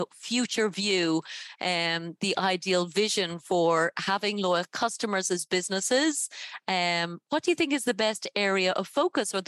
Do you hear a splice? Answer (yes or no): no